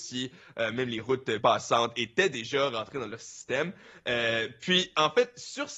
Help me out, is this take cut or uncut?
cut